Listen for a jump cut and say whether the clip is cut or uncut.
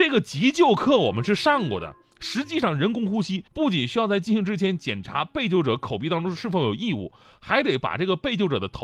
cut